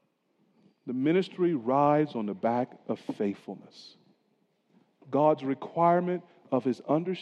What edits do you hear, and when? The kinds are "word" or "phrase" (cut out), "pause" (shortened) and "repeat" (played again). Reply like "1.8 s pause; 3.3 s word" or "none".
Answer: none